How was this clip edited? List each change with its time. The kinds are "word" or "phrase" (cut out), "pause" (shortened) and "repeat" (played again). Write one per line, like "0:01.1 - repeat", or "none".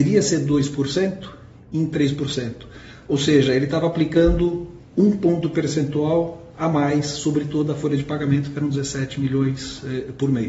none